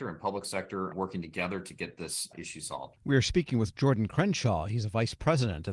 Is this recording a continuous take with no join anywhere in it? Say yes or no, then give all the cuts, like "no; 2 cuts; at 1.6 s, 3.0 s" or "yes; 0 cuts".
no; 1 cut; at 3.0 s